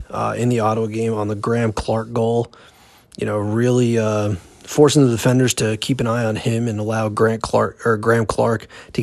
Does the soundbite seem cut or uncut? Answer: uncut